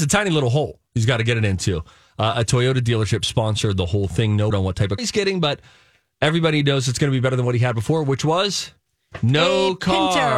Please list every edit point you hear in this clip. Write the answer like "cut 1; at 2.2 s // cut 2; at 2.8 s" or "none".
cut 1; at 4.5 s // cut 2; at 5.0 s